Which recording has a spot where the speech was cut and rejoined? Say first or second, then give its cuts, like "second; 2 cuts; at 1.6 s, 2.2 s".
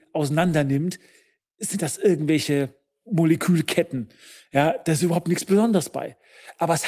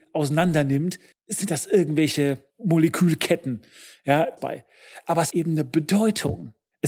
second; 4 cuts; at 1.1 s, 2.5 s, 4.4 s, 5.3 s